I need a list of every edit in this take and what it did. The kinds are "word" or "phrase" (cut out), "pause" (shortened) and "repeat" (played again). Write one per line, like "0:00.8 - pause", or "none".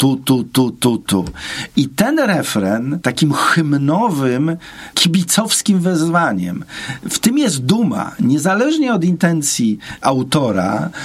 0:03.0 - word